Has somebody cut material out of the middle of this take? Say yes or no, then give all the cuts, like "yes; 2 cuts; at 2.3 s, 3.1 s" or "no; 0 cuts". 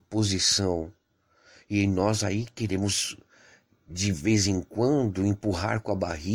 no; 0 cuts